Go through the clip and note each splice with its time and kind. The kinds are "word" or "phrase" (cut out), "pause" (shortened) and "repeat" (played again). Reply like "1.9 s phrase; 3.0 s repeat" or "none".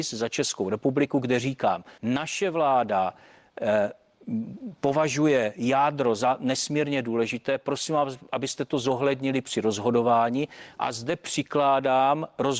1.9 s pause